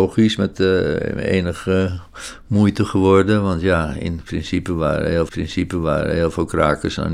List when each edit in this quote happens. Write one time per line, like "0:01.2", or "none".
0:05.3